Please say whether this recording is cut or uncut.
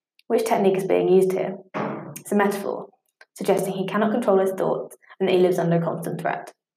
uncut